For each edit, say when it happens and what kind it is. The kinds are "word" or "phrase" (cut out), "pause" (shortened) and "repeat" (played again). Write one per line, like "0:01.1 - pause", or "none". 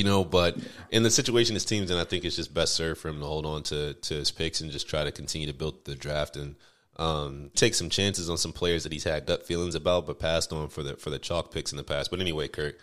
0:07.5 - word